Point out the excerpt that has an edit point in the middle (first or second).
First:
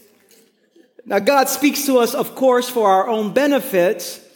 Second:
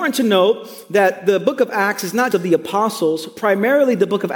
second